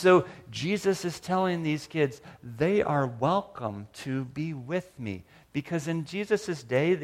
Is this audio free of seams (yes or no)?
yes